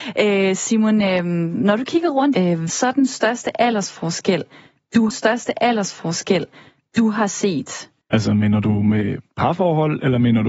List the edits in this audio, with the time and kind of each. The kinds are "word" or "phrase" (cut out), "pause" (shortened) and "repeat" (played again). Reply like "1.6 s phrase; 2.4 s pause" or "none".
2.3 s phrase; 2.7 s word; 5.1 s repeat; 8.0 s pause